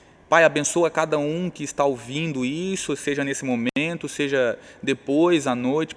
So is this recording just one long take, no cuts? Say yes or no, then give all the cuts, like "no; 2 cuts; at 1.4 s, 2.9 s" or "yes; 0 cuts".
yes; 0 cuts